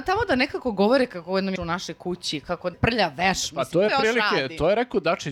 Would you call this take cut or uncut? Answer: cut